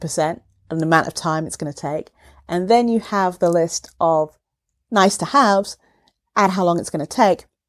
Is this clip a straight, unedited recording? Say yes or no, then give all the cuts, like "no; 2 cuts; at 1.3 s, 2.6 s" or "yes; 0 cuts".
yes; 0 cuts